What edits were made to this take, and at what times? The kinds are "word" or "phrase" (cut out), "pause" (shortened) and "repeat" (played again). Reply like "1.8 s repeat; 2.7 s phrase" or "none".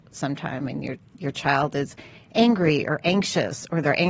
none